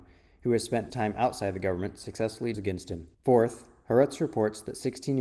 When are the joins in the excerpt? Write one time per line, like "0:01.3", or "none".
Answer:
0:00.9
0:02.5
0:03.1